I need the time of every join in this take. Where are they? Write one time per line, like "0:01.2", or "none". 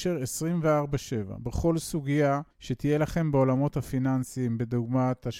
0:02.5